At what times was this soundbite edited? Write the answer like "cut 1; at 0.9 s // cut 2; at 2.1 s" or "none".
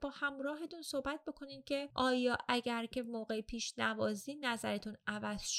none

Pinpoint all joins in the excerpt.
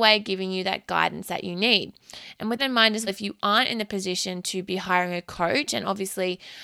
cut 1; at 2.6 s // cut 2; at 3.1 s

